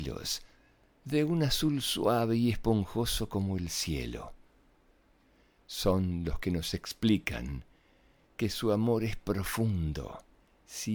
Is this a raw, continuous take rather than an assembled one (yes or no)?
yes